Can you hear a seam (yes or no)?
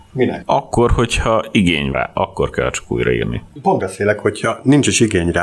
yes